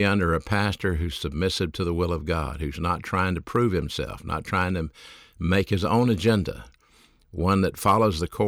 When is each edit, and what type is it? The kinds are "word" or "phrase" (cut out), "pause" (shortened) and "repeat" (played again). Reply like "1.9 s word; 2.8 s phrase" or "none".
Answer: none